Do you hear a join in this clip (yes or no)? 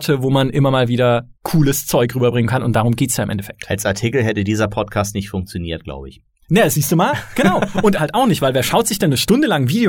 yes